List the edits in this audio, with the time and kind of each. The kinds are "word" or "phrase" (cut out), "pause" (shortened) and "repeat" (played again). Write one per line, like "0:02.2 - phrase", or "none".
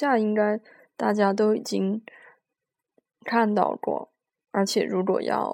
none